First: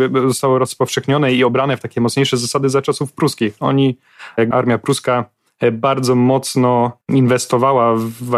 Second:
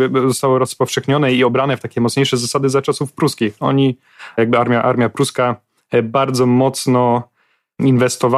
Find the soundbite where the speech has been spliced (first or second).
first